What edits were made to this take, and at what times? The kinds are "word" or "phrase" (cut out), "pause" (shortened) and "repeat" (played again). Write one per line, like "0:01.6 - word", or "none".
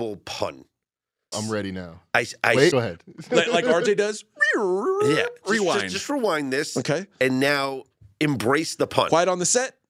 0:01.3 - phrase
0:02.7 - phrase